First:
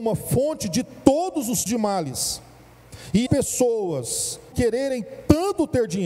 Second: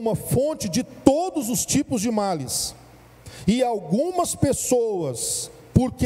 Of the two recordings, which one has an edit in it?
first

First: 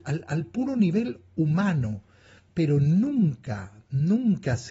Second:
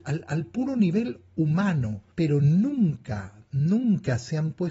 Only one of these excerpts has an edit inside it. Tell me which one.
second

